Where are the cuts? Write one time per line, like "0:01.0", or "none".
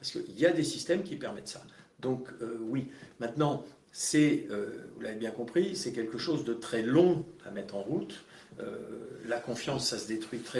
none